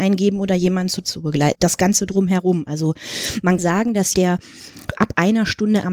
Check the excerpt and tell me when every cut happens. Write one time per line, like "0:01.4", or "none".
0:01.0
0:01.5
0:03.6
0:04.1
0:05.0